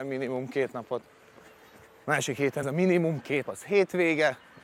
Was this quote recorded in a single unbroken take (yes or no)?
no